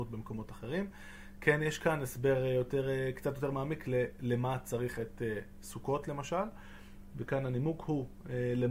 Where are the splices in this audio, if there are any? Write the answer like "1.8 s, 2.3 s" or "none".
none